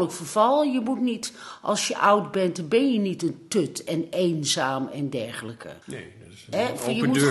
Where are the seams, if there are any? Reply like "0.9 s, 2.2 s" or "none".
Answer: 5.8 s